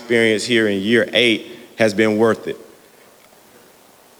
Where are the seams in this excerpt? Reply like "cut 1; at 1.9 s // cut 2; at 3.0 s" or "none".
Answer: none